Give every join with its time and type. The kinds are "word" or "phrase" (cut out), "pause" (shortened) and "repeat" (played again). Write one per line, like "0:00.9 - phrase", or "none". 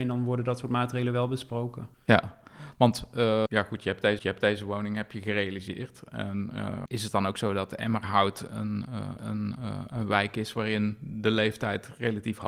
0:01.9 - pause
0:03.5 - word
0:04.2 - repeat
0:06.9 - word
0:09.2 - repeat